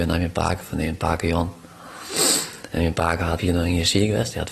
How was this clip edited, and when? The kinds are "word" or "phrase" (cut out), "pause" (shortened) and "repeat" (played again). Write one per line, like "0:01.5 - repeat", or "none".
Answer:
0:03.4 - word